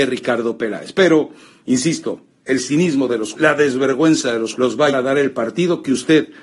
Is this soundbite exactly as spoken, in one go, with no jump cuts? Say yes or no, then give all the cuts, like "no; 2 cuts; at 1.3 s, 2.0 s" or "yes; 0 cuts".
no; 3 cuts; at 3.3 s, 4.5 s, 4.9 s